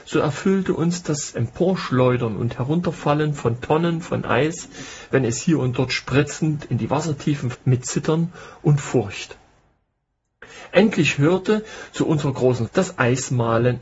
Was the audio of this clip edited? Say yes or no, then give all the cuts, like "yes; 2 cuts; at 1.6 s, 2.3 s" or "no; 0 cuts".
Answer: yes; 2 cuts; at 7.5 s, 12.7 s